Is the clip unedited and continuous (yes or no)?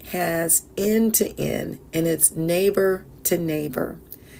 yes